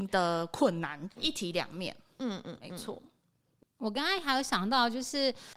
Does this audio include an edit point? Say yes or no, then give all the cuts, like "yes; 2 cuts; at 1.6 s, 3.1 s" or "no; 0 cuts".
yes; 1 cut; at 1.2 s